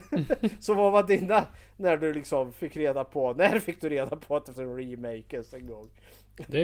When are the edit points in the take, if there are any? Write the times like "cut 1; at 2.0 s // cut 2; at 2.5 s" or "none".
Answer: cut 1; at 4.5 s